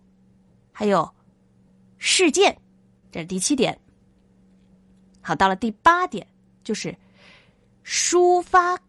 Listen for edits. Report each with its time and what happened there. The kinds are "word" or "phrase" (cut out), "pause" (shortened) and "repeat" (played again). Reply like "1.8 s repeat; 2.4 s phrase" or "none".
3.0 s word